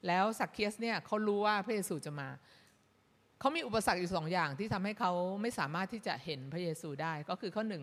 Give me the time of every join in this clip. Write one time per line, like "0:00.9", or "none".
none

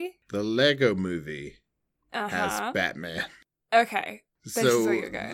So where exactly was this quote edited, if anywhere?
none

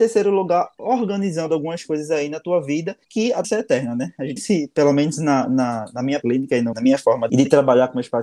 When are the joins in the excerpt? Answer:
0:03.0
0:03.4
0:04.4
0:06.2
0:06.7
0:07.3

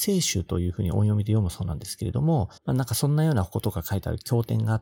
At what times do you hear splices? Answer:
0:02.6

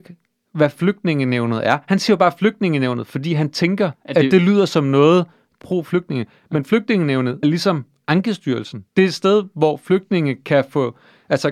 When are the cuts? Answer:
0:03.9
0:05.6
0:07.4
0:08.9

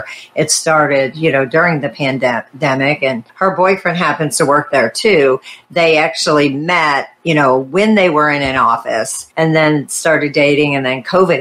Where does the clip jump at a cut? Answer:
0:03.3
0:09.3

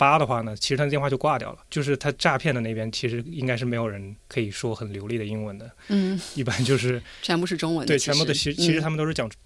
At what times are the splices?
0:04.2

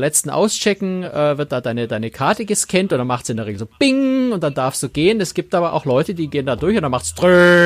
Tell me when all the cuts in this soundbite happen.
none

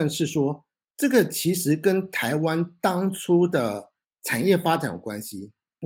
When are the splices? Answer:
none

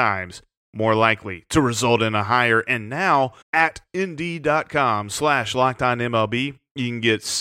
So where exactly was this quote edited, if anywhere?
0:03.4

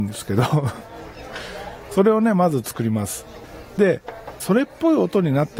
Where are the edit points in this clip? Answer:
0:04.4

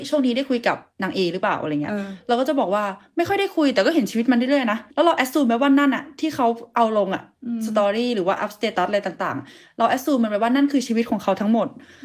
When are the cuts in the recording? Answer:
0:04.9

